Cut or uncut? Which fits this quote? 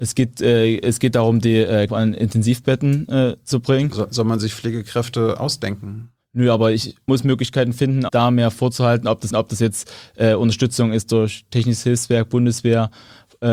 cut